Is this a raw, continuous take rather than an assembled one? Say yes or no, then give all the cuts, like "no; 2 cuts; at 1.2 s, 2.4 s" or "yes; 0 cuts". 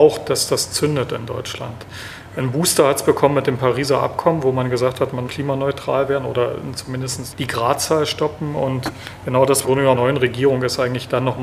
no; 4 cuts; at 5.3 s, 7.3 s, 9.6 s, 9.9 s